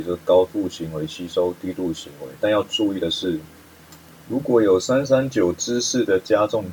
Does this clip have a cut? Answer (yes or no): no